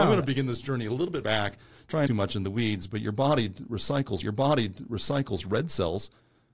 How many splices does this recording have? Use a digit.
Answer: 3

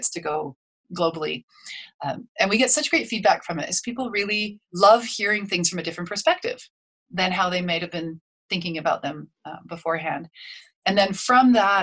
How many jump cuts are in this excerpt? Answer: 1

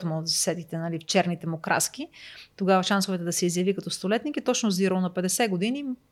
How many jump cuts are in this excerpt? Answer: 0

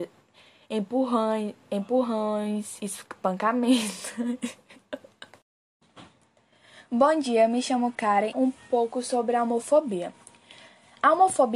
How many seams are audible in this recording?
1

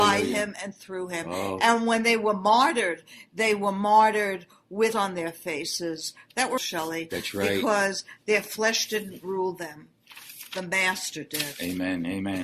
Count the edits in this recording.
2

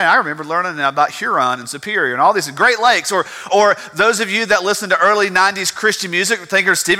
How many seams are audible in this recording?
1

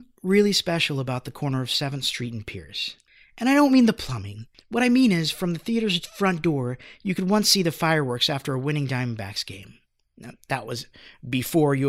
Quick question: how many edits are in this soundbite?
0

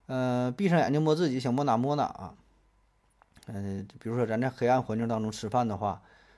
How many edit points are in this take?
0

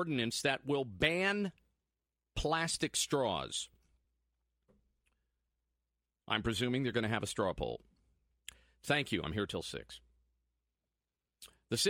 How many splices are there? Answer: 0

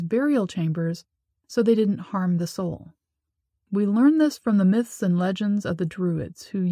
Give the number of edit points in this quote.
0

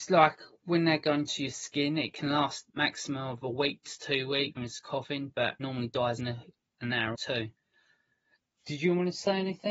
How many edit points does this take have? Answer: 5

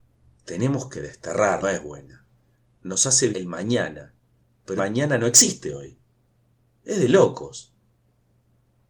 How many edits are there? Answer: 3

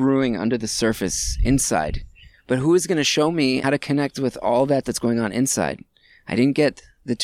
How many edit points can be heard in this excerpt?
2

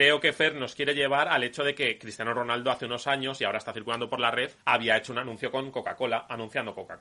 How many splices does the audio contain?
1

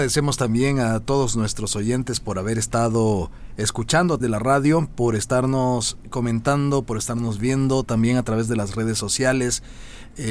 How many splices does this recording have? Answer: 1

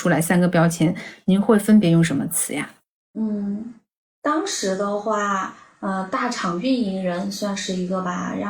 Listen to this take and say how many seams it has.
1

